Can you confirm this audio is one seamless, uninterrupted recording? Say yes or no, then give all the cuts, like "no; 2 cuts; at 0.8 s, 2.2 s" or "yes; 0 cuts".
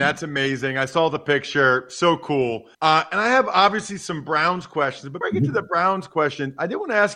no; 2 cuts; at 2.7 s, 5.2 s